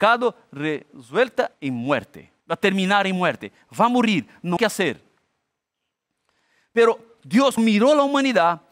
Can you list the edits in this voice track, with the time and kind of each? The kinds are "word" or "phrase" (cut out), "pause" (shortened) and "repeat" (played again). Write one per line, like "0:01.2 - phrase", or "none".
0:01.5 - pause
0:02.4 - pause
0:04.6 - word
0:07.6 - word